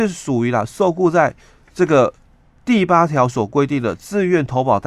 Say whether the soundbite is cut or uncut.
uncut